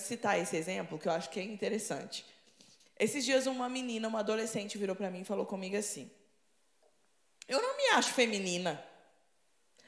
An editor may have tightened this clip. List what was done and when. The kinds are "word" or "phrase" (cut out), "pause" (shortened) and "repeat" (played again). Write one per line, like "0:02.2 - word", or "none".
none